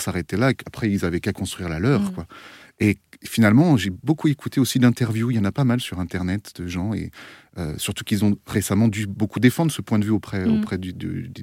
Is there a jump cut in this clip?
no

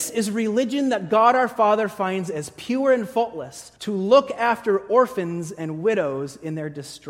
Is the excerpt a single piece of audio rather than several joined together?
no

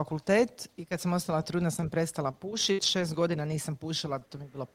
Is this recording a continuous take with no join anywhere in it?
yes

